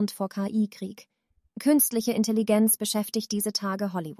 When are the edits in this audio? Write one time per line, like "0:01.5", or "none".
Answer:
none